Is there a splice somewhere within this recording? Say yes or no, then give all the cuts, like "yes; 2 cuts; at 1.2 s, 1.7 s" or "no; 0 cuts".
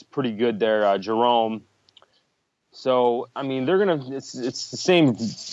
no; 0 cuts